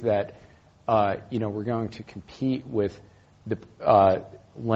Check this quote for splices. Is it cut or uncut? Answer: uncut